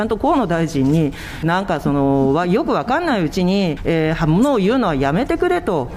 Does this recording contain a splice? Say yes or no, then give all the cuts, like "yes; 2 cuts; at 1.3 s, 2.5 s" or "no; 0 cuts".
yes; 2 cuts; at 1.4 s, 3.8 s